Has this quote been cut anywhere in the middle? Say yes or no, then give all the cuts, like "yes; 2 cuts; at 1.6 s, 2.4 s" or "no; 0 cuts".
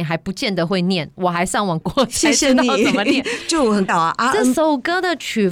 yes; 2 cuts; at 1.8 s, 3.9 s